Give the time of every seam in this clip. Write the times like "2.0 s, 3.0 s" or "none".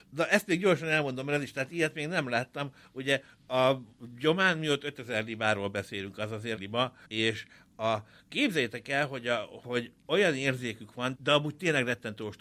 6.6 s, 7.0 s, 11.1 s